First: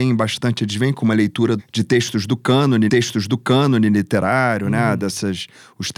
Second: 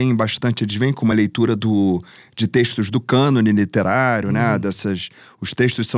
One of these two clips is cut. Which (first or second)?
first